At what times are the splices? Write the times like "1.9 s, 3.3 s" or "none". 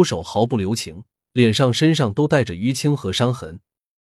1.2 s